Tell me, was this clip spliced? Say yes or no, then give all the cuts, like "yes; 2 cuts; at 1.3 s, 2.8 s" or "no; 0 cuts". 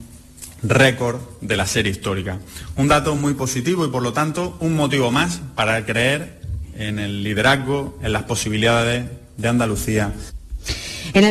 no; 0 cuts